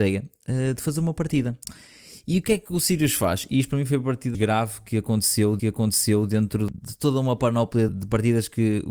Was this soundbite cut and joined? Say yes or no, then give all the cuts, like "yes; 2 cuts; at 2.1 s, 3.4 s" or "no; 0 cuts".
yes; 3 cuts; at 4.3 s, 5.6 s, 7.9 s